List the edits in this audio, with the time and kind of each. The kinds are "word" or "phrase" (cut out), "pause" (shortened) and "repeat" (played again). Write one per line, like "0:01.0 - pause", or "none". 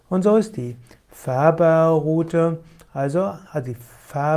0:03.4 - pause